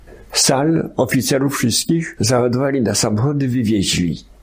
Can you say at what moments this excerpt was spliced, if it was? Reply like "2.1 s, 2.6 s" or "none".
none